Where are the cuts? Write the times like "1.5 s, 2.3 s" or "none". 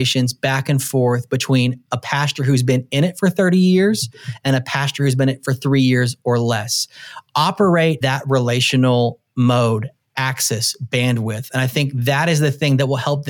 8.0 s

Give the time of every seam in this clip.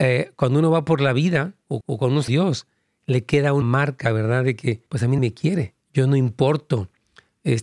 1.8 s, 2.3 s, 3.6 s, 4.9 s, 5.2 s, 5.8 s

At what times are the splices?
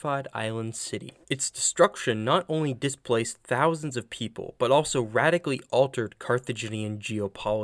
1.2 s

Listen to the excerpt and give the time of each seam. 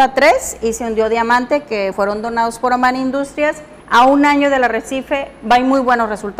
1.9 s, 3.8 s

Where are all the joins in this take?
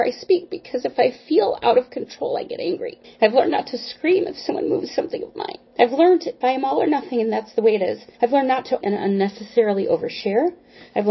3.0 s, 5.7 s, 6.4 s, 8.1 s, 8.8 s

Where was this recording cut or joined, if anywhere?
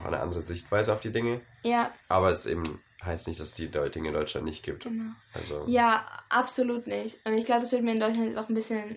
2.0 s

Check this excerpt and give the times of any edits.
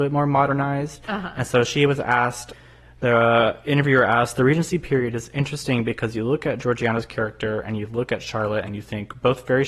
none

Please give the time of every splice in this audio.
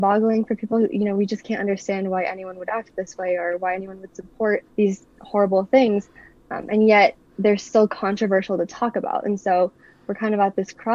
4.7 s, 7.3 s

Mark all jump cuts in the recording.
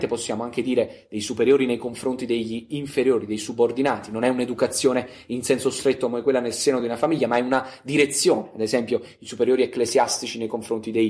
none

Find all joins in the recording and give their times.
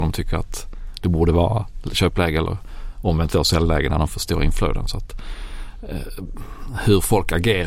none

